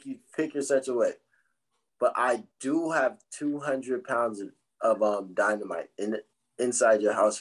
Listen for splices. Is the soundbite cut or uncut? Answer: uncut